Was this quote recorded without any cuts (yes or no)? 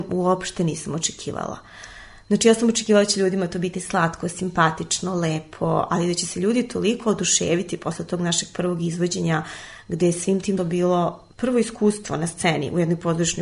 no